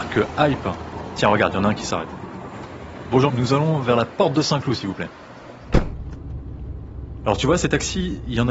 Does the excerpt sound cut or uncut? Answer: cut